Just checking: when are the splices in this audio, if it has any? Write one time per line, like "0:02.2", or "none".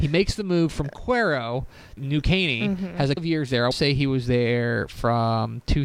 0:02.0
0:03.2
0:03.7